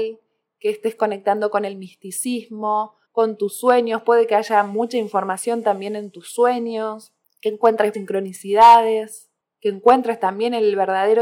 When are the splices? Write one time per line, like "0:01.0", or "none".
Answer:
0:03.0
0:07.9